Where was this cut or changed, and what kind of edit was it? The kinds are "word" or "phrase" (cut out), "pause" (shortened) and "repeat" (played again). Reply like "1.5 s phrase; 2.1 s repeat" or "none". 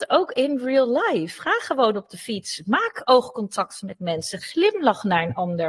none